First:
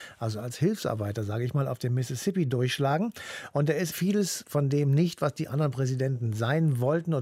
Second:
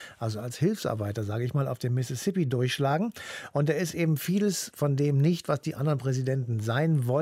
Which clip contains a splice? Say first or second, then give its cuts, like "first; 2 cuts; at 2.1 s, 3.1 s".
first; 1 cut; at 3.9 s